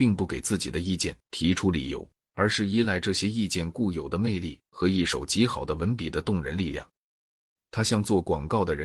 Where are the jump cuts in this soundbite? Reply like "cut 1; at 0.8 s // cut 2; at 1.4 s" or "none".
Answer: cut 1; at 2.1 s